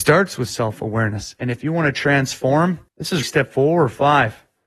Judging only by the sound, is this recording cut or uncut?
cut